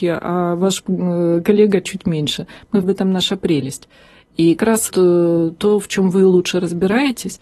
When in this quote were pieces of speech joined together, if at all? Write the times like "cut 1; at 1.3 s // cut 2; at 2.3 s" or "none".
cut 1; at 2.8 s // cut 2; at 4.6 s // cut 3; at 4.9 s